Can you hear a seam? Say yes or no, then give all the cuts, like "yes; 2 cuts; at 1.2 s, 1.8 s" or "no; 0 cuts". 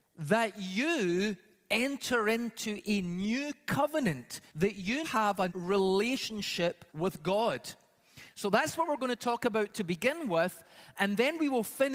yes; 4 cuts; at 4.5 s, 5.0 s, 5.5 s, 6.9 s